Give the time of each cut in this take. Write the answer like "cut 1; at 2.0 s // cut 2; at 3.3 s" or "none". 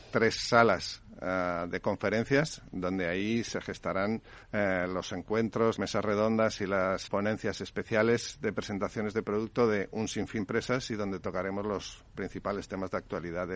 cut 1; at 4.4 s // cut 2; at 5.8 s // cut 3; at 7.1 s // cut 4; at 10.4 s